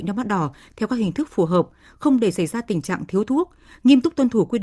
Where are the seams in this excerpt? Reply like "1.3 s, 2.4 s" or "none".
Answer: none

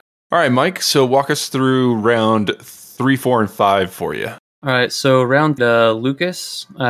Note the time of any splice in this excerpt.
5.6 s

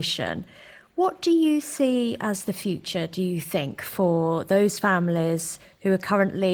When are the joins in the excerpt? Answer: none

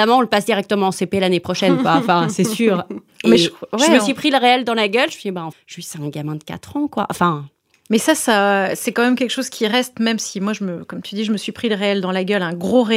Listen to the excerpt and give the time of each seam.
5.5 s

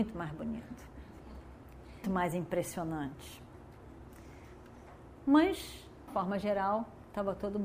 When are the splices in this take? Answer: 2.0 s, 6.1 s

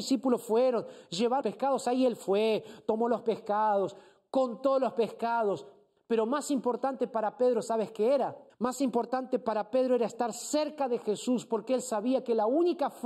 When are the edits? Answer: 1.4 s, 8.5 s

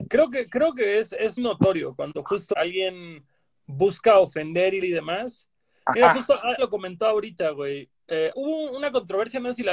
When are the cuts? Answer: 1.4 s, 2.5 s, 4.8 s, 6.6 s, 8.3 s

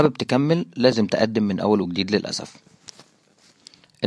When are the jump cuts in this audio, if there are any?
none

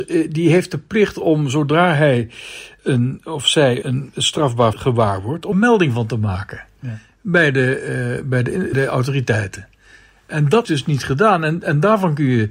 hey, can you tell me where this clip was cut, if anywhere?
2.8 s, 3.8 s, 4.7 s, 5.5 s, 8.7 s, 10.6 s

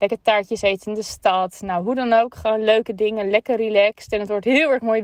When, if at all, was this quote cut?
none

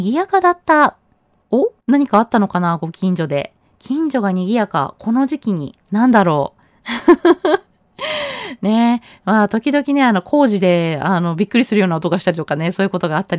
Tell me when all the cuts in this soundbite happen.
1.8 s, 5.8 s

